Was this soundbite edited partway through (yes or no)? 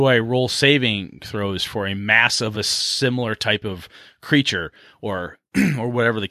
no